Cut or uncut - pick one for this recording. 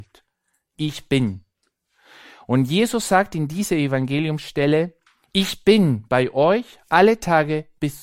uncut